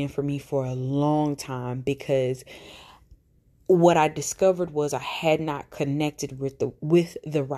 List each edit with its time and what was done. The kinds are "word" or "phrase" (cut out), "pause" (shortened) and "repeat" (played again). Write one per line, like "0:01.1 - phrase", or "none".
none